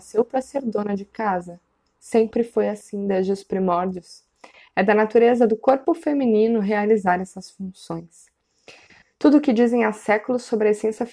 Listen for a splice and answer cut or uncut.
uncut